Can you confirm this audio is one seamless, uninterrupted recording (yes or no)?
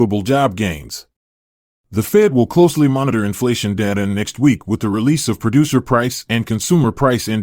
yes